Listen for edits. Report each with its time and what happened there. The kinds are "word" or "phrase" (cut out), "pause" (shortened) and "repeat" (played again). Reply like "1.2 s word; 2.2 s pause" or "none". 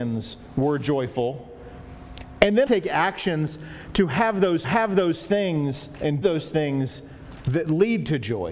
2.7 s phrase; 4.6 s repeat; 6.2 s word